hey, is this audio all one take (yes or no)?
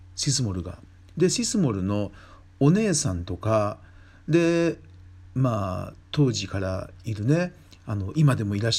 yes